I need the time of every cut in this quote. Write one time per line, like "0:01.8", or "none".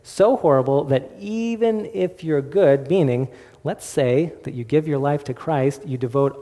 none